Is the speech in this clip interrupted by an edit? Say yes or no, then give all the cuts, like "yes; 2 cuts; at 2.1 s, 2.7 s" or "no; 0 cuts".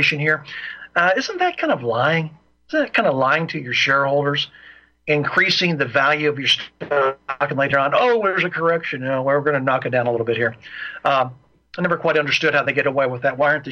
no; 0 cuts